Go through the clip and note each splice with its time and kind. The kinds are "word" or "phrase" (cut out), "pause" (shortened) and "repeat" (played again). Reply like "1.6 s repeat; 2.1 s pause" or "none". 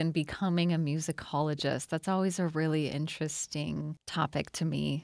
none